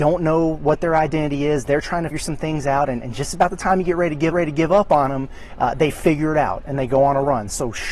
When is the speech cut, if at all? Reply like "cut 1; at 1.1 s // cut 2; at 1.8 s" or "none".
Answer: cut 1; at 2.1 s // cut 2; at 4.3 s